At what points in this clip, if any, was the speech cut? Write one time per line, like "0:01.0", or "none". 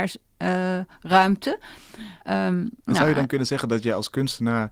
0:02.2
0:02.8